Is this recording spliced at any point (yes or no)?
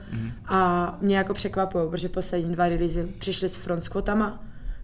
no